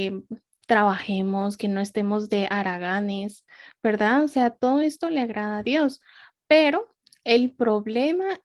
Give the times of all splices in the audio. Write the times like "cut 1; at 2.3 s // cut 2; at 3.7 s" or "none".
none